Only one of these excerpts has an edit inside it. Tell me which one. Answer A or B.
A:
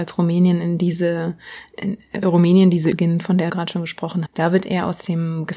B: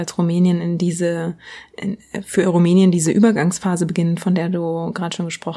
A